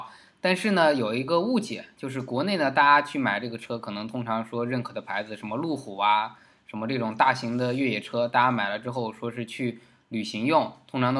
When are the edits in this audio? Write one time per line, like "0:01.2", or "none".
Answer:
none